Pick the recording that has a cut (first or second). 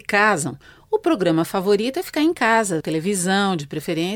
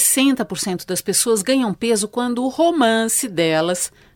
first